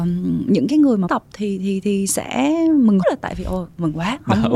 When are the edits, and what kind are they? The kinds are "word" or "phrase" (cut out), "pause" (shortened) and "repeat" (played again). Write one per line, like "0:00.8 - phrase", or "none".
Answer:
0:01.1 - word
0:03.0 - word